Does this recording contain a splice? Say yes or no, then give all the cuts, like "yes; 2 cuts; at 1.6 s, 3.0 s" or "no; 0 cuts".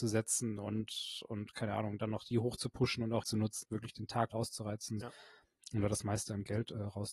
yes; 5 cuts; at 2.3 s, 3.2 s, 3.6 s, 4.3 s, 5.0 s